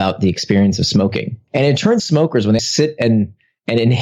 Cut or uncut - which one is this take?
cut